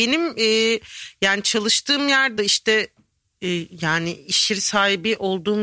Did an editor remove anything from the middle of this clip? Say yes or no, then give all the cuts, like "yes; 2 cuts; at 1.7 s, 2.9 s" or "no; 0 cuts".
yes; 1 cut; at 2.4 s